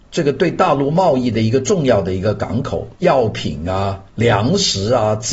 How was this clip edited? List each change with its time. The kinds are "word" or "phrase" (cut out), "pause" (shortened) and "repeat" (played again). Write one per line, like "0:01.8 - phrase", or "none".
0:02.9 - pause
0:04.1 - pause